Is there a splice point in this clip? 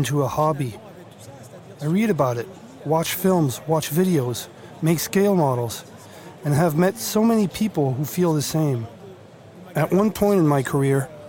no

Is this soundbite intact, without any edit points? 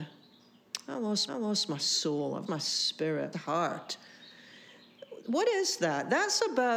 no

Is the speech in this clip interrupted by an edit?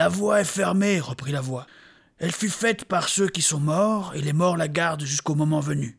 no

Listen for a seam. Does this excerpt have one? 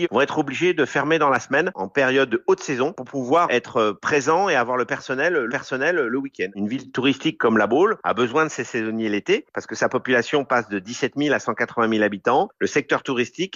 yes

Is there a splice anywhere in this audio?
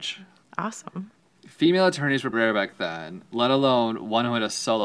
yes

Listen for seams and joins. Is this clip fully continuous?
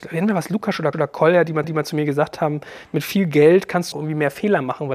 no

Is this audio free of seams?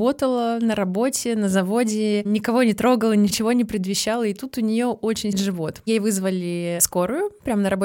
no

